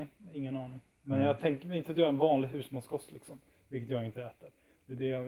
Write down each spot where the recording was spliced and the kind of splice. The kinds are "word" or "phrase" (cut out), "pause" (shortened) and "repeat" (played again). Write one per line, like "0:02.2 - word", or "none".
none